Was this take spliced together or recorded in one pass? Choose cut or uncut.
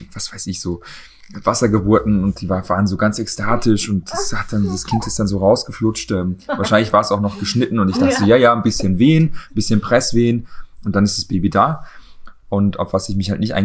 uncut